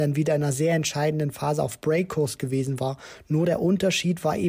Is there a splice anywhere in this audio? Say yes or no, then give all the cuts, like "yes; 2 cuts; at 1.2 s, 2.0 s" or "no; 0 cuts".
no; 0 cuts